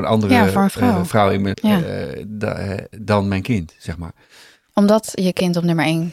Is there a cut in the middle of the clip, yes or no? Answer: yes